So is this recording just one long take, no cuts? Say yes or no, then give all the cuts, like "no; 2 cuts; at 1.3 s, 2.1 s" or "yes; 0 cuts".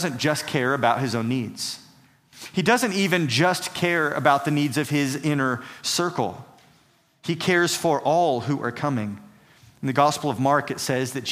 yes; 0 cuts